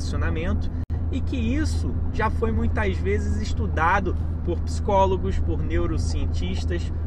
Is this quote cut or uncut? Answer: uncut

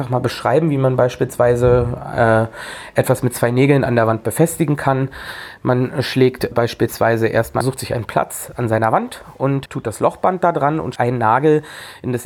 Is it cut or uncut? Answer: cut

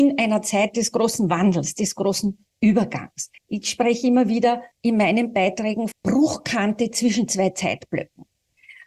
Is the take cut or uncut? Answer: cut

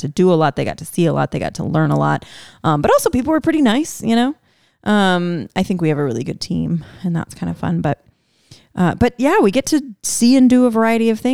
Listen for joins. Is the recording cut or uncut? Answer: uncut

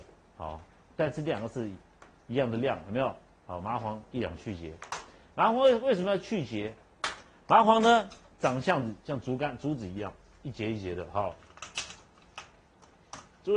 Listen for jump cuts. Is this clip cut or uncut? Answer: uncut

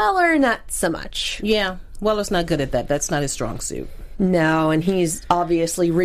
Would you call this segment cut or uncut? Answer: uncut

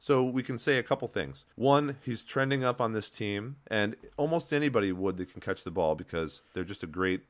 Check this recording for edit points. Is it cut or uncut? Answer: cut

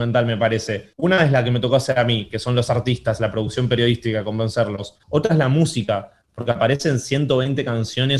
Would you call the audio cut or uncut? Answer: cut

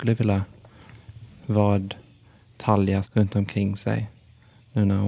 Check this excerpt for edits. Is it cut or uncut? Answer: cut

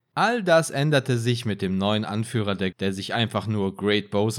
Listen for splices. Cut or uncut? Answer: cut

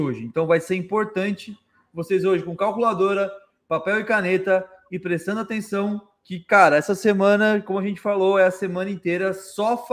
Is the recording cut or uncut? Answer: uncut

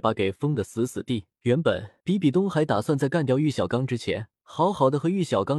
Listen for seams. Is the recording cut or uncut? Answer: cut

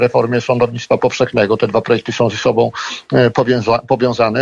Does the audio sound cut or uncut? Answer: uncut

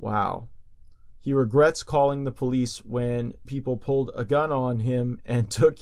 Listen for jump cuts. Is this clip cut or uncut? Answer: cut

